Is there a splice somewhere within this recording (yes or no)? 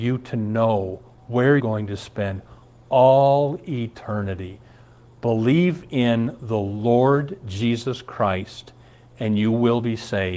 yes